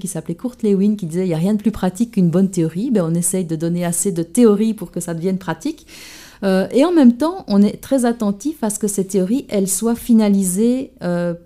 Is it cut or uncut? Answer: uncut